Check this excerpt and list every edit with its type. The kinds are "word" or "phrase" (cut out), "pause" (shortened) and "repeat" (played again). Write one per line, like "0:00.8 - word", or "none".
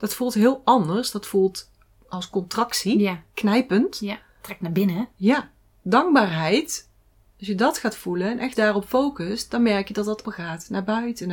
0:08.5 - word
0:10.2 - word